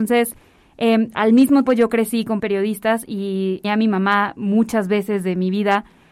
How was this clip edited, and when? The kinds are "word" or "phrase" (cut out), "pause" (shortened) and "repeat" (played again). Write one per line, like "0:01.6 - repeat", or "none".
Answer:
0:01.7 - word
0:02.4 - word
0:03.6 - word